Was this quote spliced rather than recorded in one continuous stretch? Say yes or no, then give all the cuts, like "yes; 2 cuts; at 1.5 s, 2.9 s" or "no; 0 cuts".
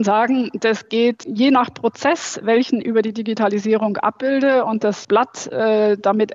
yes; 3 cuts; at 1.2 s, 2.8 s, 5.0 s